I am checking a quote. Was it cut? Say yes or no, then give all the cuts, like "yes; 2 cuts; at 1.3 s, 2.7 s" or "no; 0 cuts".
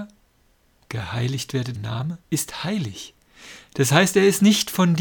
yes; 2 cuts; at 1.7 s, 2.2 s